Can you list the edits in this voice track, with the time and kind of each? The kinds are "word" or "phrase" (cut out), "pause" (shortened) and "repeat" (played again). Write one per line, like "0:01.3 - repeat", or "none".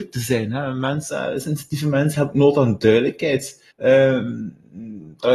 0:03.7 - pause